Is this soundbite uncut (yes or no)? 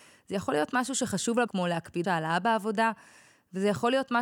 no